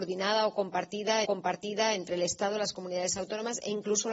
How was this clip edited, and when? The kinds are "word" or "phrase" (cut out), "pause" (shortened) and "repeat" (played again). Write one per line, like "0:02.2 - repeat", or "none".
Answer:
0:01.2 - repeat